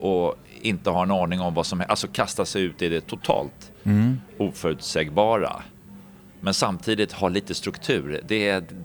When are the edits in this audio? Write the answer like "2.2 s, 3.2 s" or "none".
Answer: 4.3 s